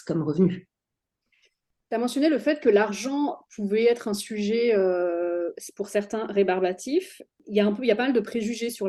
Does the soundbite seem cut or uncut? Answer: uncut